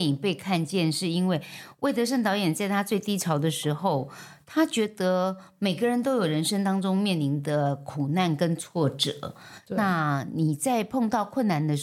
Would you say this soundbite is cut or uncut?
uncut